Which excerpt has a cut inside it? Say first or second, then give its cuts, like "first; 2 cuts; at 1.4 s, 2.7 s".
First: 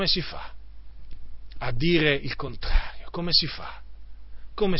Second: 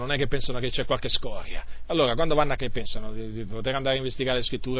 second; 1 cut; at 2.6 s